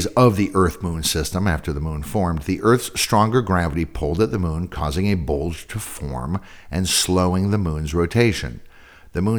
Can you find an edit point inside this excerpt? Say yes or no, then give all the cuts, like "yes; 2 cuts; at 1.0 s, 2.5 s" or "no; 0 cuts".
no; 0 cuts